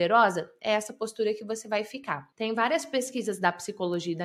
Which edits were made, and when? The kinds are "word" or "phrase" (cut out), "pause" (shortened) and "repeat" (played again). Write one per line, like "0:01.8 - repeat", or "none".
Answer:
none